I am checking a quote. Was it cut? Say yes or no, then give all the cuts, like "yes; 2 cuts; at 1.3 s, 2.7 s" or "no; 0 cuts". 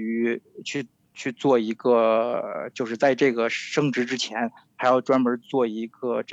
no; 0 cuts